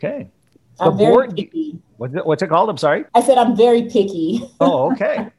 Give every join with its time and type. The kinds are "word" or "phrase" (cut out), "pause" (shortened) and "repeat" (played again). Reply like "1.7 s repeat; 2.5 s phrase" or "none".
1.9 s pause; 3.1 s pause